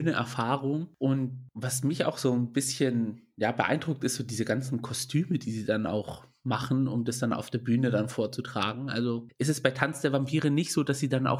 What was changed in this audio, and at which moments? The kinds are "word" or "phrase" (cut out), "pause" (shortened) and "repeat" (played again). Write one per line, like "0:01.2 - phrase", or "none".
none